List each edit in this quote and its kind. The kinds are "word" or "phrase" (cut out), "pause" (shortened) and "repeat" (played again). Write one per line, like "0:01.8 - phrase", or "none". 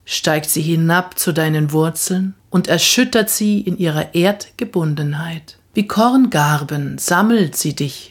0:02.4 - pause
0:05.7 - pause